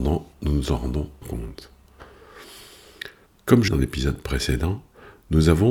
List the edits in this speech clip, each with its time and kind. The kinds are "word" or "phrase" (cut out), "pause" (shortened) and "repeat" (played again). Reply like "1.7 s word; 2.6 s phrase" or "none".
1.2 s word; 3.3 s pause; 3.7 s phrase